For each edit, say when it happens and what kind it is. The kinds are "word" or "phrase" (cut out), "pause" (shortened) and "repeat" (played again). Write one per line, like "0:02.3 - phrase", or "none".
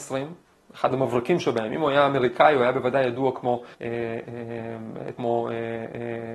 0:03.7 - pause
0:05.2 - phrase